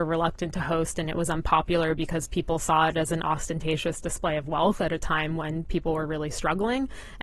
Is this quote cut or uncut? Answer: uncut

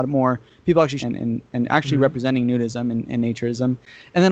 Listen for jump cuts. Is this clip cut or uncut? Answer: cut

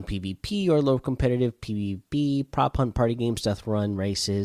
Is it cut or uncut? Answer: uncut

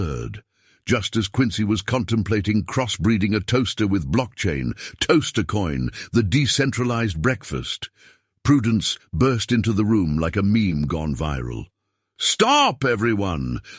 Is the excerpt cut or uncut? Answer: uncut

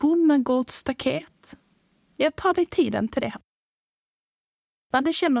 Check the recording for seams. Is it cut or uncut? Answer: uncut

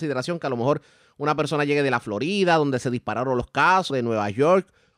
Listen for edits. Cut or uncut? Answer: cut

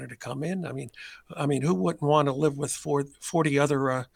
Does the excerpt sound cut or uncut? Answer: uncut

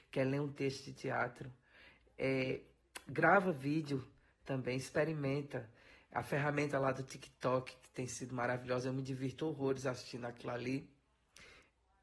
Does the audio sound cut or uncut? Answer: uncut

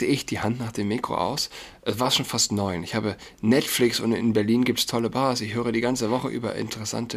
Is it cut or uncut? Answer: uncut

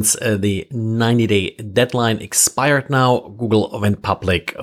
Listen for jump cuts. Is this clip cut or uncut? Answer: uncut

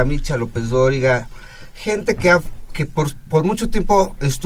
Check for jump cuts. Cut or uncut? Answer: uncut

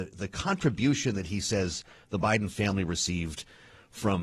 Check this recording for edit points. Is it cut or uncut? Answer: uncut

